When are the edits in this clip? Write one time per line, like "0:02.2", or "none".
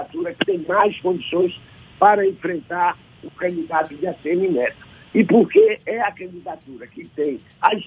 none